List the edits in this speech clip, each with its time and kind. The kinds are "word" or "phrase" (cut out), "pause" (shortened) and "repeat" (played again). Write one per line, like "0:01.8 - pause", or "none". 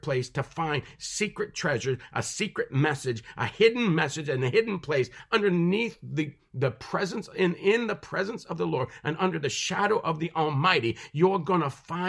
none